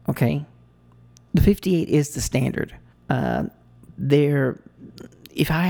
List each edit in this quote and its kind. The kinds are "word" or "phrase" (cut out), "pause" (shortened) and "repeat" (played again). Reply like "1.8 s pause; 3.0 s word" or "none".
2.9 s pause